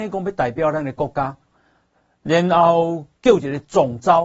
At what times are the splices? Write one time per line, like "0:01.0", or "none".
none